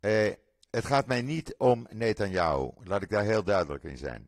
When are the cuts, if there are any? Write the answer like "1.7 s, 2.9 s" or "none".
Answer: none